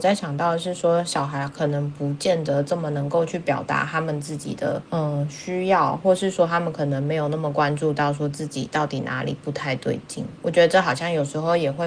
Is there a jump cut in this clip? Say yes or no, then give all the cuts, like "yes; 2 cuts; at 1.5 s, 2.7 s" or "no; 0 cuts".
yes; 1 cut; at 4.9 s